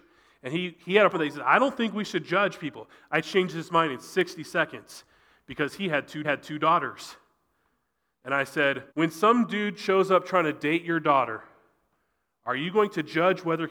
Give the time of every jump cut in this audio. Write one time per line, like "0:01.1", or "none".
0:01.1
0:06.2
0:08.9